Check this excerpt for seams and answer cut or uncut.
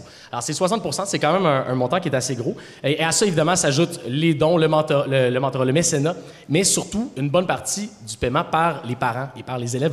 uncut